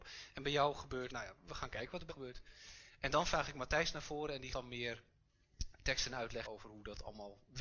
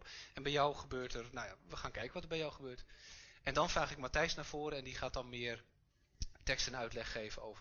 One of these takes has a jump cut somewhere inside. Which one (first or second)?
first